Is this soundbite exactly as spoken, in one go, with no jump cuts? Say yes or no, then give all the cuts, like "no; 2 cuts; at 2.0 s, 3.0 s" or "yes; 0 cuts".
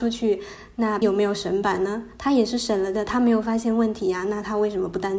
no; 1 cut; at 1.0 s